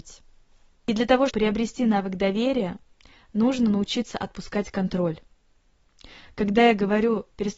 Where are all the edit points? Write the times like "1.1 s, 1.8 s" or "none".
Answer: 1.3 s